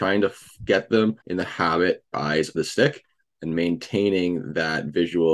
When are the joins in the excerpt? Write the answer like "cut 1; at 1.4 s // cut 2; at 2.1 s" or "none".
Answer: cut 1; at 1.2 s // cut 2; at 2.1 s // cut 3; at 2.5 s